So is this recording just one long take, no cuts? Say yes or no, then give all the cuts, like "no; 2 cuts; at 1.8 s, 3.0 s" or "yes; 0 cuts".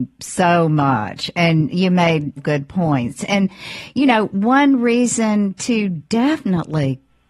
no; 1 cut; at 2.4 s